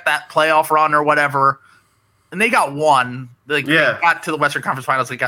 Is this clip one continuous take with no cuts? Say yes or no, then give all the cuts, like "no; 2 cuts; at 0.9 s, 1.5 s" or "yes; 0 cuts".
yes; 0 cuts